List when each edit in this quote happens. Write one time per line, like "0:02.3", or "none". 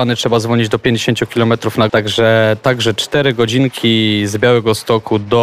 0:01.9